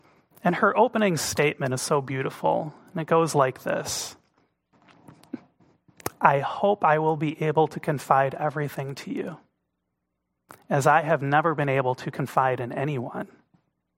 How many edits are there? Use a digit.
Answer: 0